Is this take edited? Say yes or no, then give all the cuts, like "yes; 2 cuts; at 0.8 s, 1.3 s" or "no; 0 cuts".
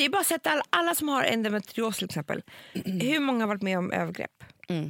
no; 0 cuts